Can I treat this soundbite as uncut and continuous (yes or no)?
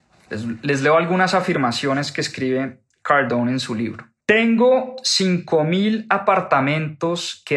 no